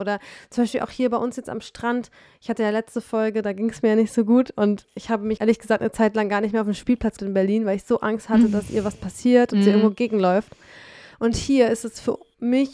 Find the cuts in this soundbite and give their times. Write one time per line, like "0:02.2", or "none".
0:04.8
0:05.4
0:07.2